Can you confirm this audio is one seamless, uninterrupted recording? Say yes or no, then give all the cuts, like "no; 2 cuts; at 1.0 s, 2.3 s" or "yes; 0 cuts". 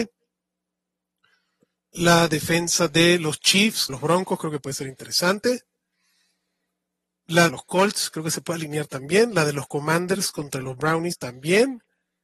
no; 2 cuts; at 3.9 s, 7.5 s